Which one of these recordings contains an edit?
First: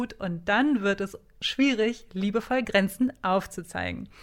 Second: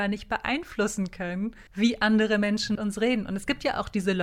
second; 2 cuts; at 1.7 s, 2.7 s

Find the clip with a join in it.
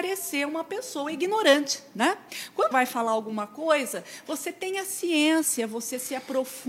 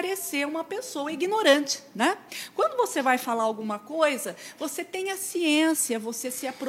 first; 1 cut; at 2.7 s

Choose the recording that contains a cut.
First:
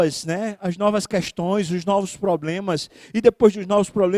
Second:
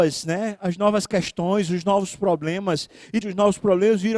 second; 1 cut; at 3.2 s

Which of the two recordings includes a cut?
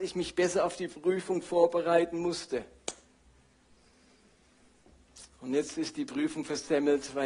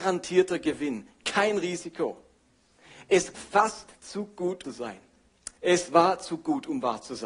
second; 3 cuts; at 3.3 s, 4.6 s, 5.6 s

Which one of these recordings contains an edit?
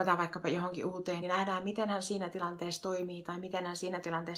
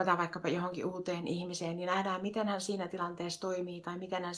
first; 1 cut; at 1.2 s

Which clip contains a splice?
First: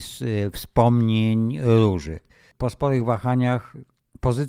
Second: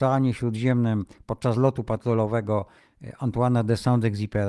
first; 1 cut; at 2.3 s

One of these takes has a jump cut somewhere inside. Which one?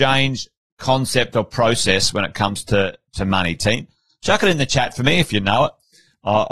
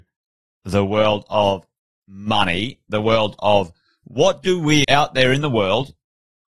second; 1 cut; at 4.8 s

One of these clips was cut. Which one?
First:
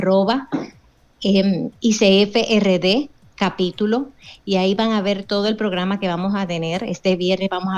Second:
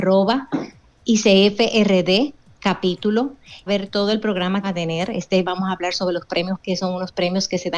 second; 5 cuts; at 1.0 s, 3.7 s, 4.6 s, 5.4 s, 6.6 s

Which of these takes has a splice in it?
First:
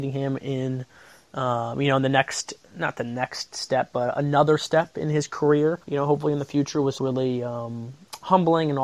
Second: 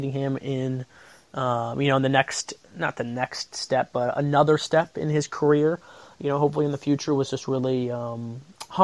first; 2 cuts; at 5.8 s, 7.0 s

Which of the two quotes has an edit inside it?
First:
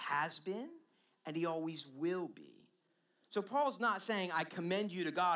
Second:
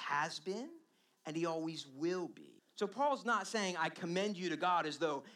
second; 1 cut; at 2.6 s

